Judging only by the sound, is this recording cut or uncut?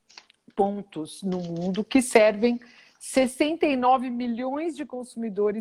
uncut